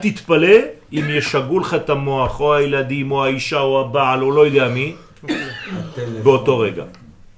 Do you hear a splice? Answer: no; 0 cuts

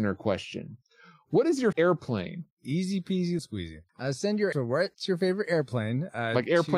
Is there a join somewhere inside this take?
yes; 5 cuts; at 1.7 s, 2.5 s, 3.4 s, 3.9 s, 4.5 s

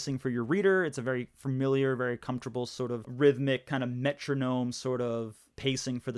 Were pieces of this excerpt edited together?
no; 0 cuts

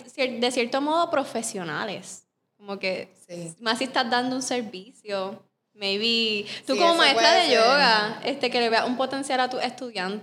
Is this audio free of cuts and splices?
yes; 0 cuts

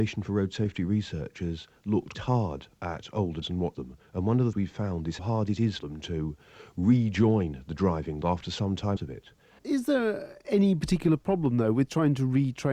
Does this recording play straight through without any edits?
no; 8 cuts; at 2.1 s, 3.4 s, 3.7 s, 4.5 s, 5.2 s, 5.8 s, 8.2 s, 9.0 s

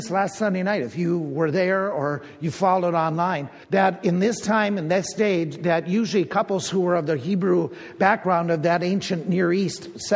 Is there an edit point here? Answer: yes; 1 cut; at 3.6 s

